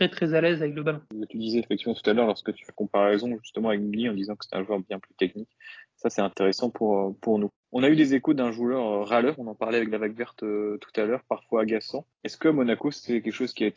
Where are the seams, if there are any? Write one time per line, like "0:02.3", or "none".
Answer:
0:12.1